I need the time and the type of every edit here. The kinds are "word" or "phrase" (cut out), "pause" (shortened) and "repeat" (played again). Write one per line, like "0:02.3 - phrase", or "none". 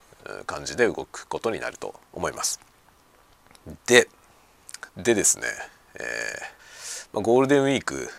0:02.1 - pause
0:04.9 - pause
0:06.6 - pause